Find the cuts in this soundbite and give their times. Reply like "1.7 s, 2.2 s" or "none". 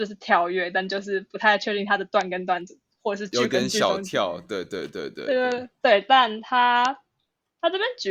none